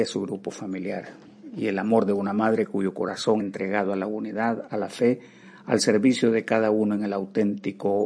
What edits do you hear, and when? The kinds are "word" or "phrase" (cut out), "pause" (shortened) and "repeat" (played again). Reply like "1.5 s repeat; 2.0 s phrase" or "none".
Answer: 3.4 s word